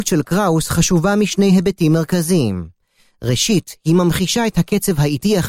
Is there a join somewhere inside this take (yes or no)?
no